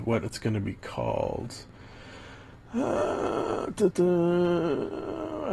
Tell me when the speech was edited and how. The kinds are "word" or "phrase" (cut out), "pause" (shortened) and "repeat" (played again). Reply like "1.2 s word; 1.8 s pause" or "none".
3.9 s word